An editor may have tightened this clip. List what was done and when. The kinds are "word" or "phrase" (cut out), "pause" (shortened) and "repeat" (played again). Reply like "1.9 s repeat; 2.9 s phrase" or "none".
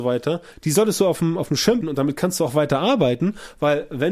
1.8 s word